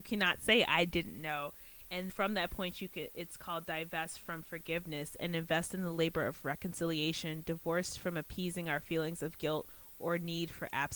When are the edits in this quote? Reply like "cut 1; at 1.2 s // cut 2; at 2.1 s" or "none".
cut 1; at 2.1 s